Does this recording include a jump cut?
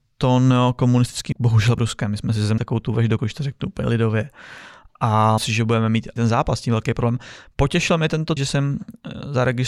yes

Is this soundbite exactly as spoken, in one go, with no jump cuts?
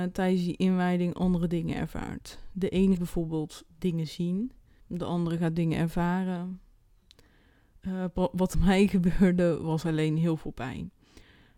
no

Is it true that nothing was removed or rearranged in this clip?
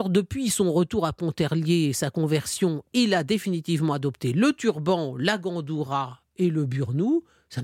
yes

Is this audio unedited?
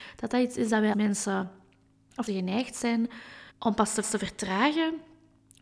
no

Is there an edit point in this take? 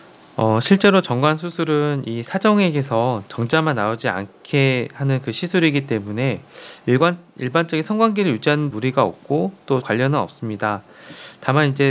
yes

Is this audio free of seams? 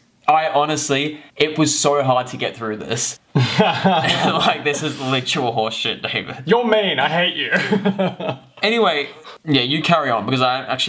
no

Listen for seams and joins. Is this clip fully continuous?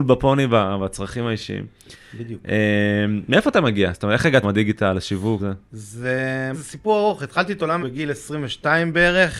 no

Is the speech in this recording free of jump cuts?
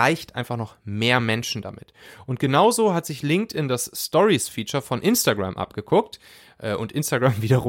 yes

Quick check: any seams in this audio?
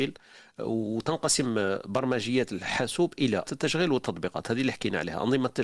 yes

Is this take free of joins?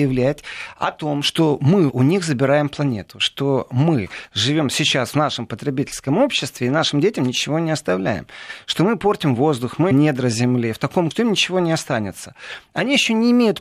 no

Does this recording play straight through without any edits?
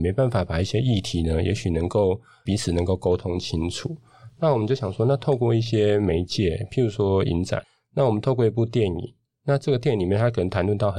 yes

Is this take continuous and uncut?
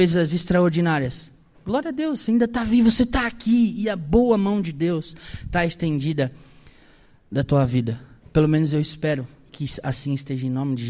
yes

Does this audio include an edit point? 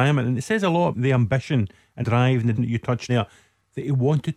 yes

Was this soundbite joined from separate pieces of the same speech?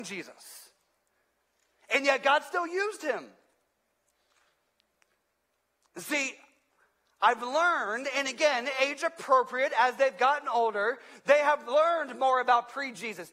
no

